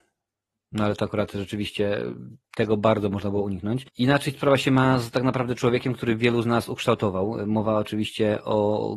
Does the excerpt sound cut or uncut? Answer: cut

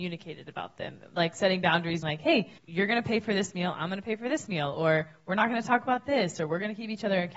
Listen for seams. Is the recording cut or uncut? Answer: cut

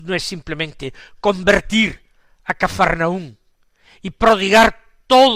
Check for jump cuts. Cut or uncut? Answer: uncut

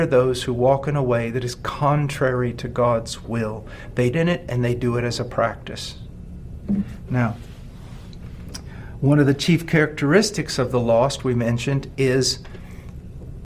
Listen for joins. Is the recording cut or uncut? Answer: cut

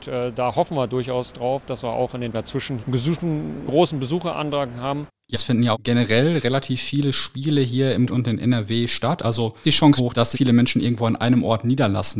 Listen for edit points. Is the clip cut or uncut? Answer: cut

